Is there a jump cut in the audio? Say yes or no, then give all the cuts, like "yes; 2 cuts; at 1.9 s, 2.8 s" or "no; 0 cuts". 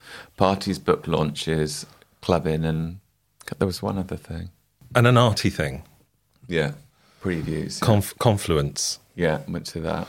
no; 0 cuts